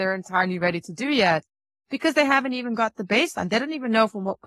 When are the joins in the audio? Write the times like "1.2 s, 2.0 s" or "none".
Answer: none